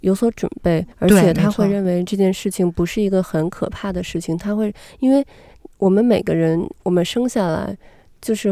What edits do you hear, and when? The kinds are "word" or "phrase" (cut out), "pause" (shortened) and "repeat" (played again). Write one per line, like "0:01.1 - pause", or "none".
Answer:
0:00.9 - pause